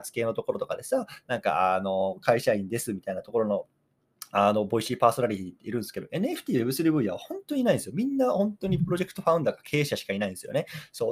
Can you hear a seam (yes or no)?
no